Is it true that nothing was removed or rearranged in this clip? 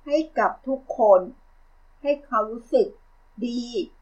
yes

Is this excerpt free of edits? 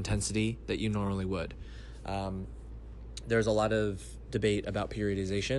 yes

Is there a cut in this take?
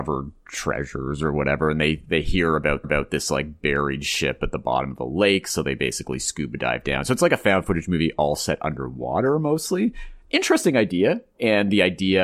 yes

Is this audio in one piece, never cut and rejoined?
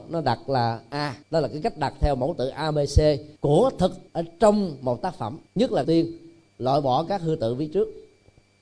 no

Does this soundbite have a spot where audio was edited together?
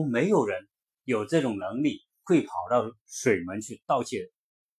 no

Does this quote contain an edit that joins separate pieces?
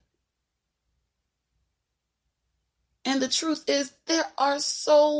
no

